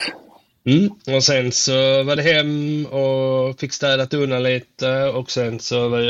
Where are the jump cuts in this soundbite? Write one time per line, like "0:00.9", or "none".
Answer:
none